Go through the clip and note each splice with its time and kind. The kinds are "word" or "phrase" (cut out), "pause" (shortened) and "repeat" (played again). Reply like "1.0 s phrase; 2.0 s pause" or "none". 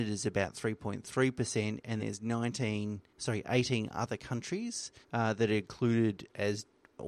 2.0 s word; 3.1 s pause; 5.0 s pause